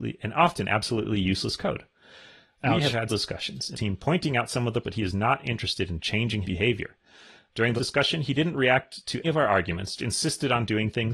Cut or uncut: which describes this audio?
cut